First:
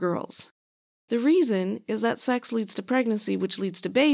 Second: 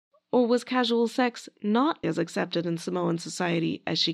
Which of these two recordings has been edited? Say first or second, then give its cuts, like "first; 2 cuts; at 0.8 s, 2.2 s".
second; 1 cut; at 2.0 s